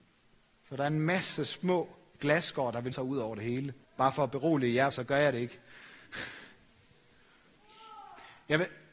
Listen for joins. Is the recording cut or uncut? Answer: cut